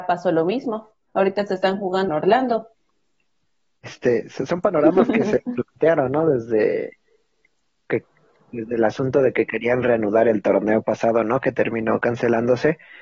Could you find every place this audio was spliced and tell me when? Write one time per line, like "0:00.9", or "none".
0:02.1